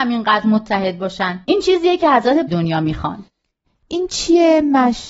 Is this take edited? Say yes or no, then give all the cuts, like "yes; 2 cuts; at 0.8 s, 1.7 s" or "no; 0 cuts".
yes; 2 cuts; at 1.4 s, 2.5 s